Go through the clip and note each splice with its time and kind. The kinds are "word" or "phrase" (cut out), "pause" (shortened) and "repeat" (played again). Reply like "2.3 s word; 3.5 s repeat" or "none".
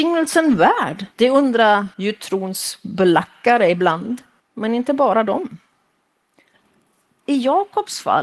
1.1 s pause; 1.9 s pause; 4.4 s pause